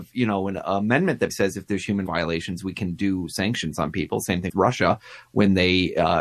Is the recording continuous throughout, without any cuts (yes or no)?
no